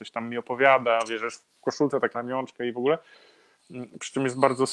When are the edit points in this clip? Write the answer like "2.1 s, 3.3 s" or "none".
2.1 s